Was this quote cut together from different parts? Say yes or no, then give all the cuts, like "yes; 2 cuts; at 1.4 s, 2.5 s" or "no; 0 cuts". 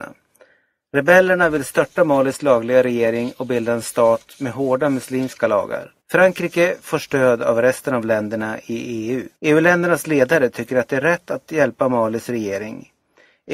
yes; 2 cuts; at 6.0 s, 9.4 s